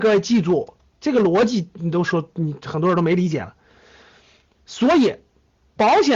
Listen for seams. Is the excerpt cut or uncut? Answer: uncut